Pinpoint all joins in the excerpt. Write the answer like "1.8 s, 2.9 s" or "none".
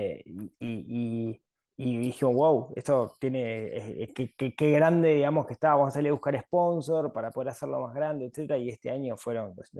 none